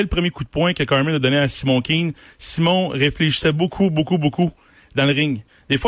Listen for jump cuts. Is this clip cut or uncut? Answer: uncut